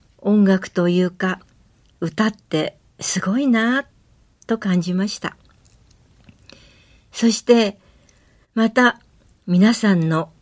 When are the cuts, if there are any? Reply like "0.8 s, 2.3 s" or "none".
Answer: none